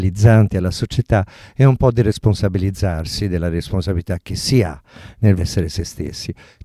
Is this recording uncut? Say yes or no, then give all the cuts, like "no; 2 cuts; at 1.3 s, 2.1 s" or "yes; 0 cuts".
no; 1 cut; at 5.4 s